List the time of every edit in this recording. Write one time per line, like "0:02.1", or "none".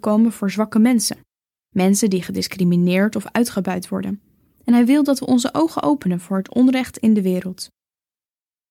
none